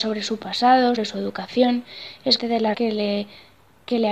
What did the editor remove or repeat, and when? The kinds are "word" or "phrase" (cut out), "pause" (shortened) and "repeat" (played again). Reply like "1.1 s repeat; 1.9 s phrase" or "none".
1.0 s word; 2.4 s word; 2.7 s word